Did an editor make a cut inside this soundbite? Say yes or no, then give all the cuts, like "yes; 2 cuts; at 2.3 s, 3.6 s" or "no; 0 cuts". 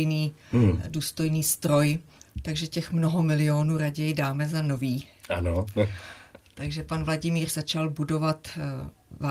yes; 2 cuts; at 2.2 s, 7.5 s